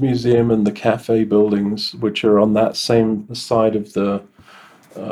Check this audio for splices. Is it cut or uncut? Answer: uncut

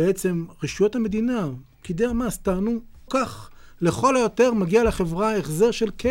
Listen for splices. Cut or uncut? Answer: cut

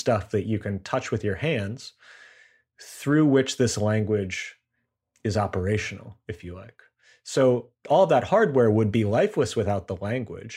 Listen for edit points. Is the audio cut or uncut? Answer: uncut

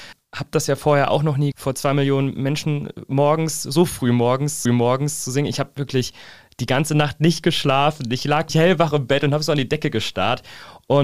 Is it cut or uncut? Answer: cut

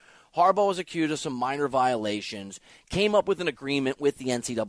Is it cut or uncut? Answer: uncut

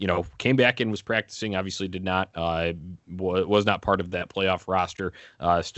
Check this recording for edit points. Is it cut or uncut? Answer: uncut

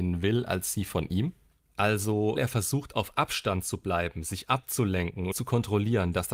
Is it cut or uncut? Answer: cut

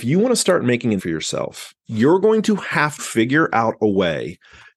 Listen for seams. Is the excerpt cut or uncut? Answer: cut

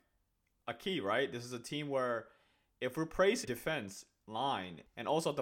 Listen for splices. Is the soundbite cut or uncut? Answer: cut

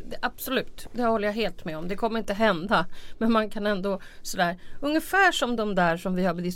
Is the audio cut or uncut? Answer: uncut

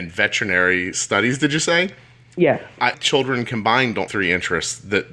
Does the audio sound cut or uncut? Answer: cut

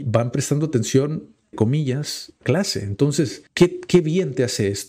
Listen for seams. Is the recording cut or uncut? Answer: cut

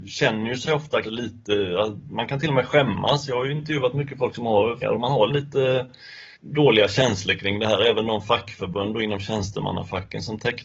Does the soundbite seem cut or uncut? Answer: cut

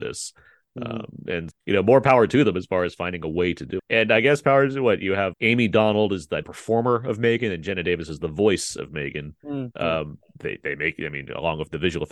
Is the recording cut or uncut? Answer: cut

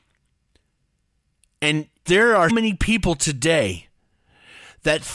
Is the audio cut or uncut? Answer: cut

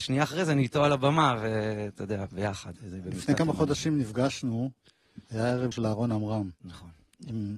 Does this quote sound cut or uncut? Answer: cut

